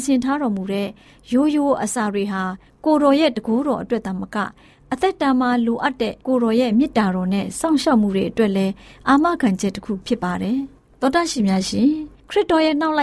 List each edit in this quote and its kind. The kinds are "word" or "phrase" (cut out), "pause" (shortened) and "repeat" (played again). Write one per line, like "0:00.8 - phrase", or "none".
0:06.2 - pause